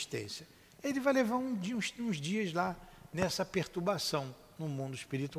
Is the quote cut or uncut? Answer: uncut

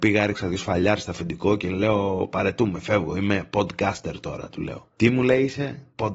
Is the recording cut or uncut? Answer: uncut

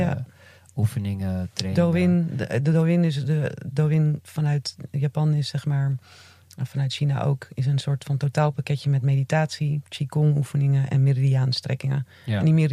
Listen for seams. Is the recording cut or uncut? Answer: uncut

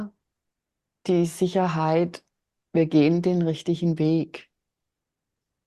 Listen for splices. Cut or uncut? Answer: uncut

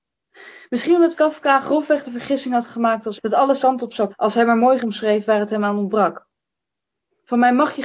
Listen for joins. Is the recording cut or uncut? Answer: cut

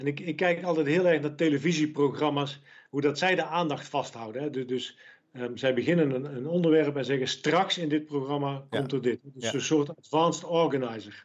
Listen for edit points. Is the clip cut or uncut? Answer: uncut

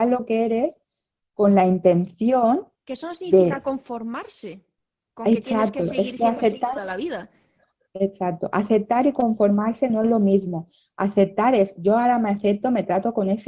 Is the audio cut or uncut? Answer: uncut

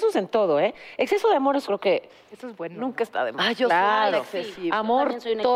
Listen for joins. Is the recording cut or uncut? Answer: cut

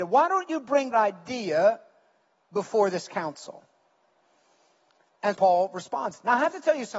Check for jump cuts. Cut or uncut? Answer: cut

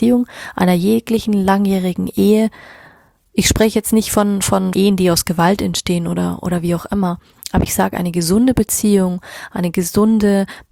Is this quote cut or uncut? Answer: cut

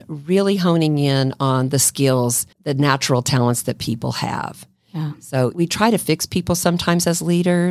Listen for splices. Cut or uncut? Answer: cut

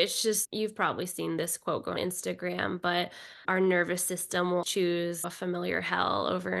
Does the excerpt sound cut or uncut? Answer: cut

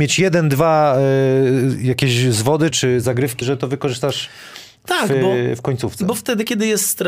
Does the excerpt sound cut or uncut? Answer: cut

